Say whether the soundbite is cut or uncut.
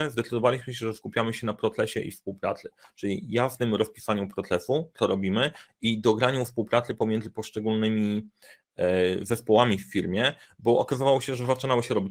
uncut